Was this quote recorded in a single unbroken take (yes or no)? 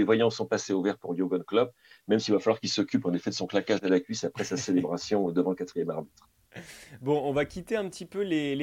yes